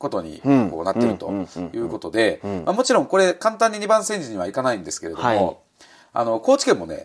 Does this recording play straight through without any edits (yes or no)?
yes